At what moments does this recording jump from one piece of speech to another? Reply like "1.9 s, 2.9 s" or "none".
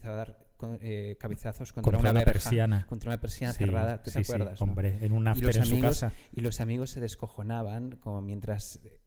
none